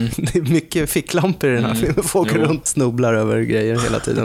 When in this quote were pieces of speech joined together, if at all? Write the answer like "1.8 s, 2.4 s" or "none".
2.6 s